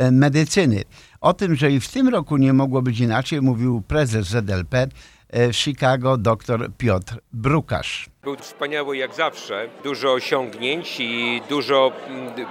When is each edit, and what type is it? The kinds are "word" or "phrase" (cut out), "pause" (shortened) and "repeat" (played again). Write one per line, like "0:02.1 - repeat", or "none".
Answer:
0:08.4 - word

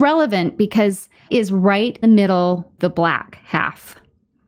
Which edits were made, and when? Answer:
0:01.3 - word
0:02.0 - word
0:02.8 - word

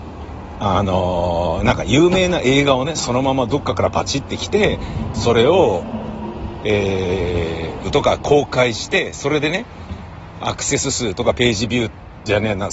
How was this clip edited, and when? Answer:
0:07.8 - word

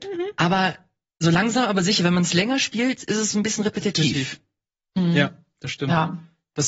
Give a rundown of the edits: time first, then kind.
none

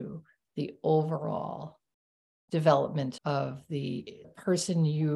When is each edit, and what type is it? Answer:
0:03.2 - word
0:04.2 - word

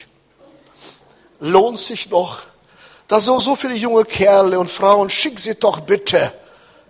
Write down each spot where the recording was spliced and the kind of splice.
none

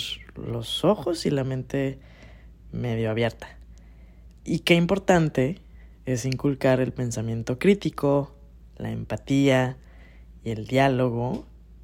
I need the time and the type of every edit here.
0:04.4 - pause

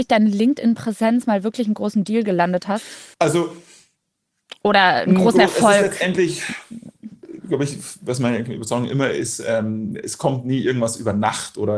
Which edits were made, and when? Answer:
0:03.1 - pause

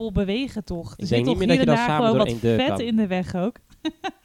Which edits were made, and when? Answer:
none

